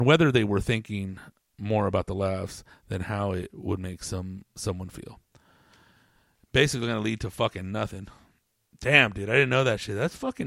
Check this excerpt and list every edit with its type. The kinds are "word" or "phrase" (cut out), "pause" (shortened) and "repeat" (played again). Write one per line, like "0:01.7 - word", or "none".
none